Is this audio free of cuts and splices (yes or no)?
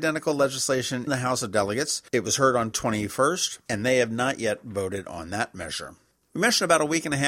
no